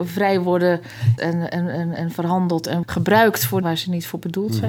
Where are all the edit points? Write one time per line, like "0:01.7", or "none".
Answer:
0:01.2
0:01.9
0:02.8
0:03.6